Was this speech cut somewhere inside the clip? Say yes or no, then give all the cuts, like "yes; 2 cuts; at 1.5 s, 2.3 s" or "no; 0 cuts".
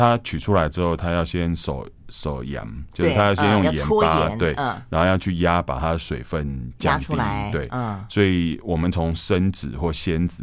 no; 0 cuts